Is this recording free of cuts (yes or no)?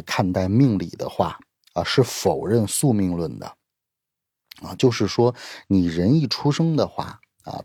yes